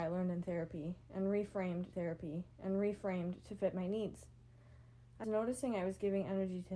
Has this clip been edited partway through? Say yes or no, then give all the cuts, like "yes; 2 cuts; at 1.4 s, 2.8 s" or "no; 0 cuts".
yes; 2 cuts; at 1.9 s, 5.2 s